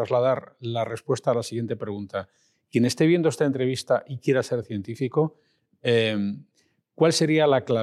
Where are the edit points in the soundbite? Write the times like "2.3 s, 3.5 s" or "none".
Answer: none